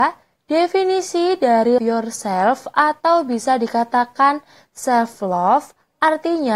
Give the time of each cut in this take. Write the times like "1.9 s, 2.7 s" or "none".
1.8 s